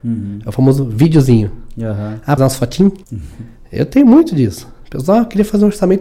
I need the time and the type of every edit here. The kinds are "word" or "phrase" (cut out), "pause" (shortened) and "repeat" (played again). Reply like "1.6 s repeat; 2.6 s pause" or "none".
2.4 s phrase; 3.0 s pause

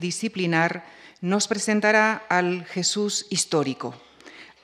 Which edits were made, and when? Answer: none

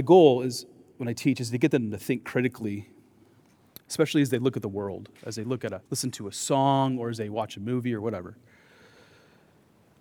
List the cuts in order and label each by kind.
5.9 s pause

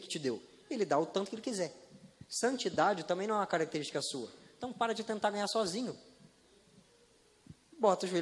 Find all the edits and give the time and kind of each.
none

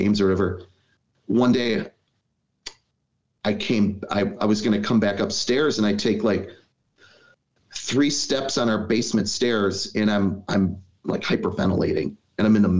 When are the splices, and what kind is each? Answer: none

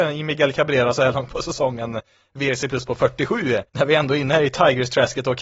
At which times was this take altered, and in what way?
3.7 s pause

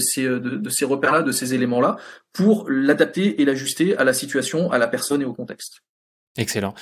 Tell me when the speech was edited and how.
none

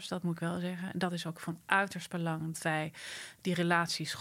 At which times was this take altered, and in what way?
2.5 s word

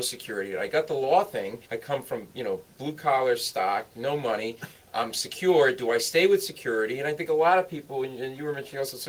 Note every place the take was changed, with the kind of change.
1.6 s pause

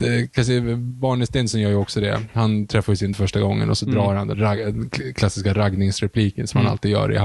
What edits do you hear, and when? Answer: 3.1 s word; 4.3 s word

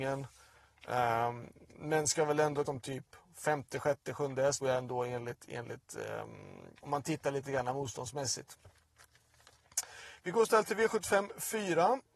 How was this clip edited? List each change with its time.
2.7 s phrase; 4.6 s word; 6.8 s pause

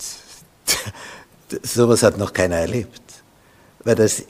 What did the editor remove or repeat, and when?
none

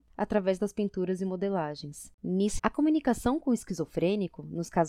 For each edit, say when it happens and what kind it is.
2.6 s word

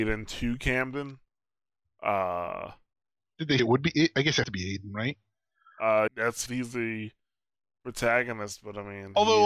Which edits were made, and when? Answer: 3.6 s word; 4.4 s word; 6.1 s word; 6.5 s word

